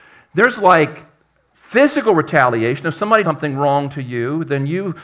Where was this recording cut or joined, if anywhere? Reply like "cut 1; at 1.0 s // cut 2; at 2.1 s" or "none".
cut 1; at 3.2 s